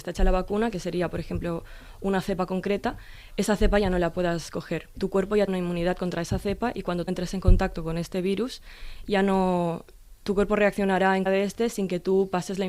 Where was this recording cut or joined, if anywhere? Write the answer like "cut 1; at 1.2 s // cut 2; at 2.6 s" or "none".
cut 1; at 4.9 s // cut 2; at 5.5 s // cut 3; at 7.1 s // cut 4; at 11.3 s